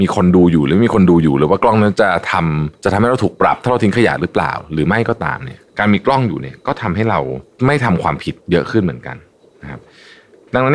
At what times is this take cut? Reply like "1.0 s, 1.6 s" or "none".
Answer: 2.8 s, 5.7 s